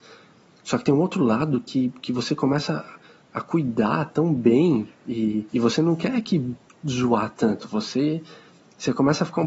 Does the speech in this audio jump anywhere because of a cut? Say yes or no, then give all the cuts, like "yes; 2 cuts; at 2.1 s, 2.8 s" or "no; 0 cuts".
yes; 2 cuts; at 5.5 s, 6.7 s